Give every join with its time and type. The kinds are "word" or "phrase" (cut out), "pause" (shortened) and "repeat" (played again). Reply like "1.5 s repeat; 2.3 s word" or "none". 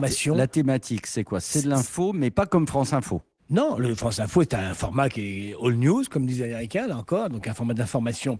none